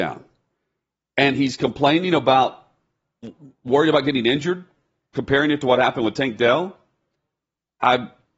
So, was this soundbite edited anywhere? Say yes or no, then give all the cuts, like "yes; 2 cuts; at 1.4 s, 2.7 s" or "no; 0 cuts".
no; 0 cuts